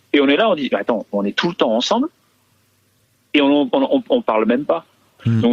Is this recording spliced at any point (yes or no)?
no